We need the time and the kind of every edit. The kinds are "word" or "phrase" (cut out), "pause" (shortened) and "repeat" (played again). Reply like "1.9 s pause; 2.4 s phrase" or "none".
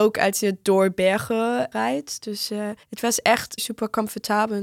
1.7 s word; 2.8 s pause; 3.6 s word